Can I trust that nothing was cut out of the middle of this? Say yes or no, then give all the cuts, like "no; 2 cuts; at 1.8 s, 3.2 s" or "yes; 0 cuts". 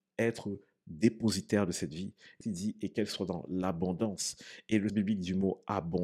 no; 2 cuts; at 2.4 s, 4.9 s